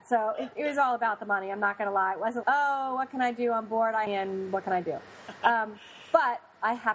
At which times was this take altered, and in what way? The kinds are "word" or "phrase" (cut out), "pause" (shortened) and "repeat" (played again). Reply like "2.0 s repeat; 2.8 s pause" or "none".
2.4 s word; 4.1 s phrase